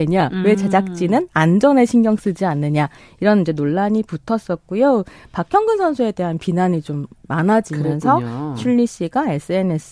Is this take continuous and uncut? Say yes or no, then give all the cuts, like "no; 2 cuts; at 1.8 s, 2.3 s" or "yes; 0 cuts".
yes; 0 cuts